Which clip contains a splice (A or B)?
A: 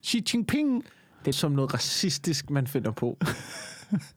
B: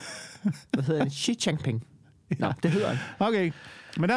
A